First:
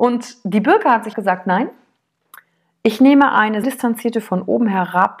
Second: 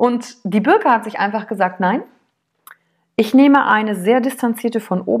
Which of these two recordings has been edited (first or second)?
first